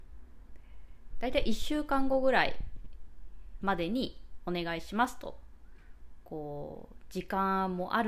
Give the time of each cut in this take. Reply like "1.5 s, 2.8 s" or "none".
1.1 s